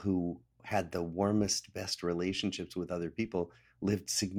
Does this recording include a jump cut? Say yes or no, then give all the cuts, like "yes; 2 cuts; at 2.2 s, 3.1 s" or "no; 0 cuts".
no; 0 cuts